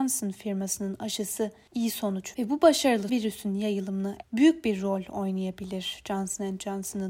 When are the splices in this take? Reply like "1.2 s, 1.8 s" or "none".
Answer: 2.3 s, 3.1 s, 4.2 s